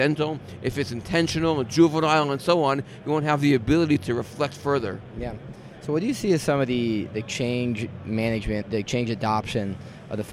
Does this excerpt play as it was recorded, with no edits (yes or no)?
no